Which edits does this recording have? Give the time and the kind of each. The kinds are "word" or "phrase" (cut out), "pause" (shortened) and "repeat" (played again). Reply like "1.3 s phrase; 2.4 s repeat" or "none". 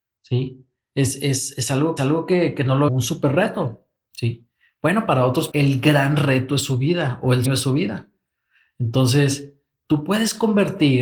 2.0 s repeat; 2.9 s phrase; 5.5 s phrase; 7.5 s word